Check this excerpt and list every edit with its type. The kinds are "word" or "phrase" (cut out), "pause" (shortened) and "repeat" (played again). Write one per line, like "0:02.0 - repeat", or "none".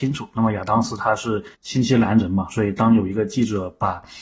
0:01.5 - pause